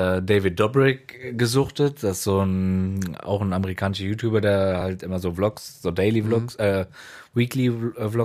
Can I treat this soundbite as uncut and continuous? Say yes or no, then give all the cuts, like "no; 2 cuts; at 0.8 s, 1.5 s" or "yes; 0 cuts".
yes; 0 cuts